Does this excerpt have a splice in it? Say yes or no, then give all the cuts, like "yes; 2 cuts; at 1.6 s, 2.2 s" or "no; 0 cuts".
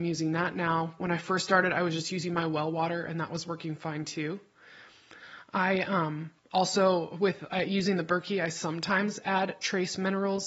yes; 1 cut; at 6.4 s